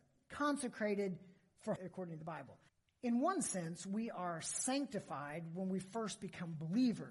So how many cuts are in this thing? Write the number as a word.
two